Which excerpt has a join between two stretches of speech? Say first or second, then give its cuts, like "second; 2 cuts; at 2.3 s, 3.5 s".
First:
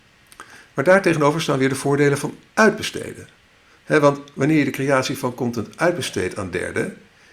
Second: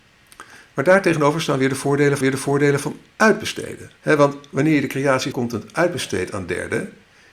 second; 3 cuts; at 2.2 s, 4.0 s, 5.3 s